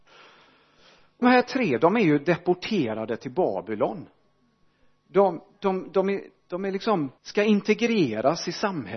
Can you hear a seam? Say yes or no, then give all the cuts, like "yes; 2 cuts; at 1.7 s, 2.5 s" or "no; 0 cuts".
yes; 2 cuts; at 1.2 s, 7.2 s